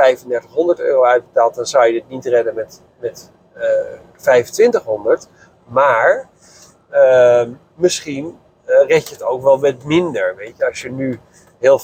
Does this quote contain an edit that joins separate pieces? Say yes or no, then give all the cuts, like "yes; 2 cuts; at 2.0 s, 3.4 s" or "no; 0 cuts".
no; 0 cuts